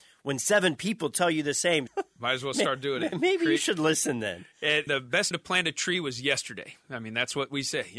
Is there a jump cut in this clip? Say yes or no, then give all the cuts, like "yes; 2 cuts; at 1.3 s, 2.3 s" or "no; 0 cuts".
yes; 4 cuts; at 1.9 s, 3.1 s, 4.9 s, 5.3 s